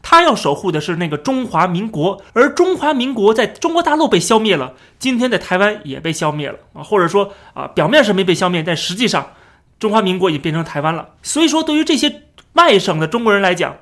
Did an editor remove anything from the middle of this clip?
yes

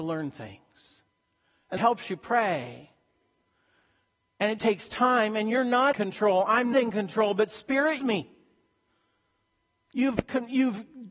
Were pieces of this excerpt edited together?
yes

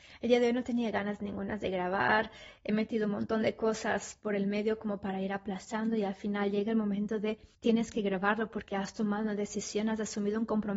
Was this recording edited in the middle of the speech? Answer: yes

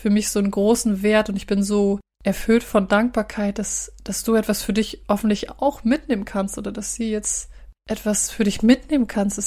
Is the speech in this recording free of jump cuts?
yes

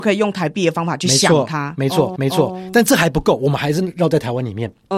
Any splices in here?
yes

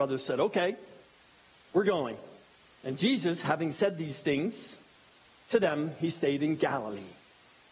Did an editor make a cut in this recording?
no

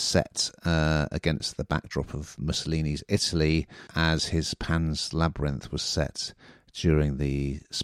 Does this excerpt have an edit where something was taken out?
yes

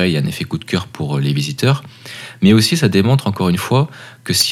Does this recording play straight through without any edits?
yes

